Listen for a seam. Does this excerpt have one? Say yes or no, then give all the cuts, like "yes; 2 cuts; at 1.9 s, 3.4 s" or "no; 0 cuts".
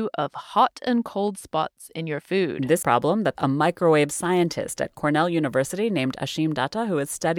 yes; 2 cuts; at 2.8 s, 3.4 s